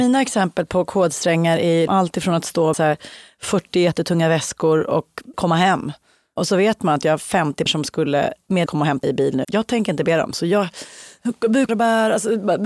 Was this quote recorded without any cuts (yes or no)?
no